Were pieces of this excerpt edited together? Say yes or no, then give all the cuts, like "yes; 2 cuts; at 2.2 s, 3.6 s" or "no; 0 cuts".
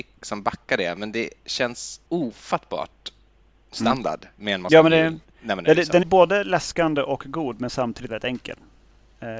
yes; 3 cuts; at 2.1 s, 6.0 s, 8.1 s